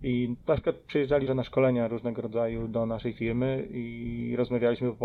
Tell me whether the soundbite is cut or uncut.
cut